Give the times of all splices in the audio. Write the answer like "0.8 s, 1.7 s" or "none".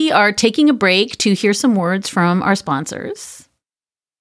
none